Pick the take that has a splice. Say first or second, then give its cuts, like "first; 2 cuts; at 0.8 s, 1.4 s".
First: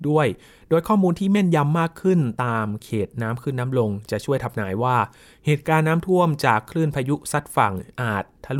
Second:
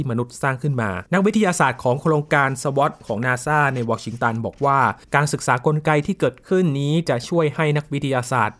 second; 2 cuts; at 1.1 s, 5.0 s